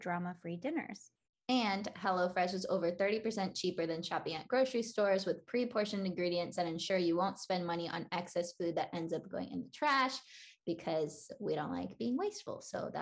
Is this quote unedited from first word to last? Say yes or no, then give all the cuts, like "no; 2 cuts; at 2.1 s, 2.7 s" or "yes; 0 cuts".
yes; 0 cuts